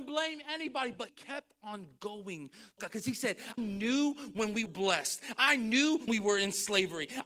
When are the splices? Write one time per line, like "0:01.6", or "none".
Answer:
0:01.1
0:02.8
0:03.6
0:04.7
0:06.1